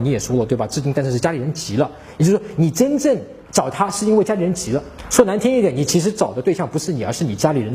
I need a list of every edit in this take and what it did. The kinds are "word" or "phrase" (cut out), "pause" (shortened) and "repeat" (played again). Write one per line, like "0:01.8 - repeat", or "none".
0:03.5 - pause